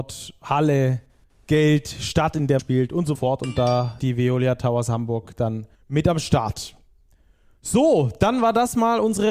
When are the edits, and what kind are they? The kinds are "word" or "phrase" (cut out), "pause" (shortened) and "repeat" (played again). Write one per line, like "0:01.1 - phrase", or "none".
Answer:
0:02.6 - word
0:03.1 - phrase
0:04.0 - word
0:05.7 - pause